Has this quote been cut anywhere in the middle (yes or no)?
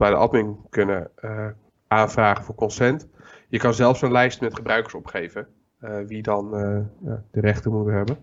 no